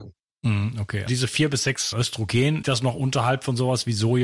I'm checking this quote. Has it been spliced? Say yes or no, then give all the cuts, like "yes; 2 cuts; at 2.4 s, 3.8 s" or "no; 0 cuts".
yes; 3 cuts; at 1.1 s, 1.9 s, 2.6 s